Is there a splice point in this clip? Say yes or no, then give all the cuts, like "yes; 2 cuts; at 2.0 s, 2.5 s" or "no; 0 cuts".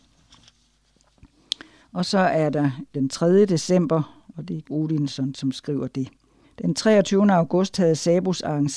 yes; 4 cuts; at 1.8 s, 2.9 s, 4.6 s, 6.4 s